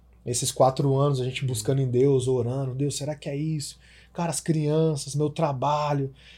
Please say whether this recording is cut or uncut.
uncut